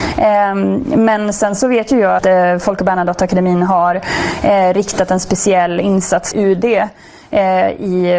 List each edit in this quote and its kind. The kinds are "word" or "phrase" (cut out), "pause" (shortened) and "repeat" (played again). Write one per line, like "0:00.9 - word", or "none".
0:02.2 - word
0:06.3 - word